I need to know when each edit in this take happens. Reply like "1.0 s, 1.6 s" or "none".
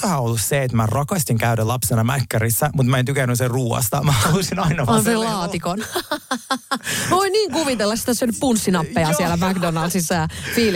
none